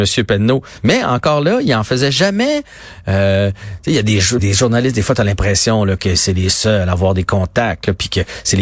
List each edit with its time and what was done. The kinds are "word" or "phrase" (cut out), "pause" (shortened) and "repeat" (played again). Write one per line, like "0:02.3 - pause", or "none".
0:04.4 - word